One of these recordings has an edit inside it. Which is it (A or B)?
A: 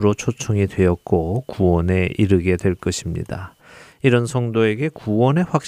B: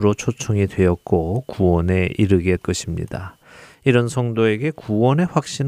B